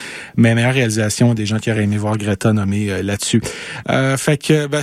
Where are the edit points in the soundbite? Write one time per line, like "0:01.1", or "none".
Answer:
none